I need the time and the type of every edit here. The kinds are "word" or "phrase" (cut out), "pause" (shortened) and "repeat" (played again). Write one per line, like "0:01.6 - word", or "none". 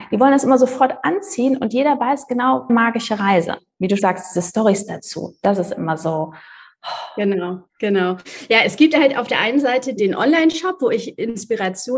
0:02.7 - phrase
0:04.0 - word
0:07.7 - pause
0:10.0 - word